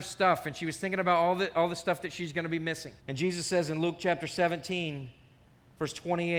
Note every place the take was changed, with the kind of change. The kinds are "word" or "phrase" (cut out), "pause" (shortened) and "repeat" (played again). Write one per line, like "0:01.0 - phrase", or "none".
0:03.0 - pause

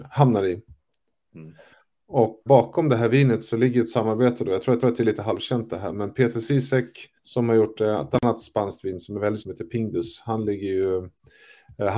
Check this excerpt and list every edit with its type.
0:02.5 - word
0:04.8 - repeat
0:07.2 - pause
0:09.4 - word

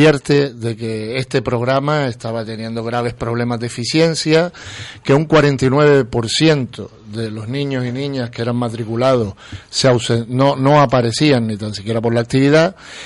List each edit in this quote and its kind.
none

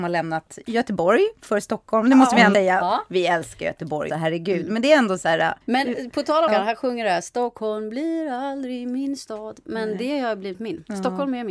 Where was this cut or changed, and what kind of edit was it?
0:02.5 - word
0:04.1 - word
0:05.6 - pause
0:06.5 - phrase

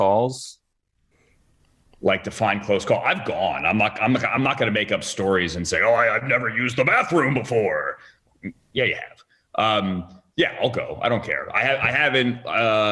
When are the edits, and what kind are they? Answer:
none

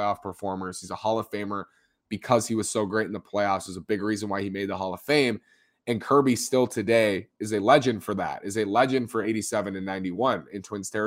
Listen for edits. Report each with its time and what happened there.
none

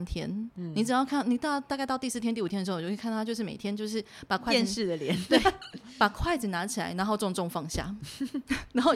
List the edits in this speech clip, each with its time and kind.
none

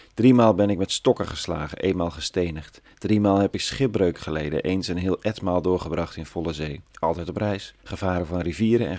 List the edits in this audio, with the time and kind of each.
0:06.8 - pause
0:07.8 - pause

